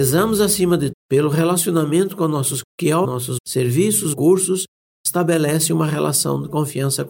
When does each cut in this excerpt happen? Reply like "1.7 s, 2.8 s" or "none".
0.9 s, 2.6 s, 3.0 s, 3.4 s, 4.1 s